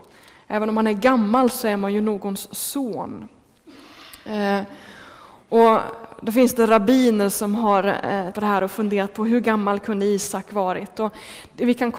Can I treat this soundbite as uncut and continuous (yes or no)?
no